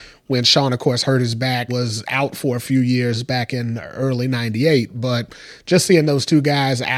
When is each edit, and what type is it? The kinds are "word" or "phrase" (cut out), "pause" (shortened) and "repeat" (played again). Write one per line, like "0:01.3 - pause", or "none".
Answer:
0:01.7 - word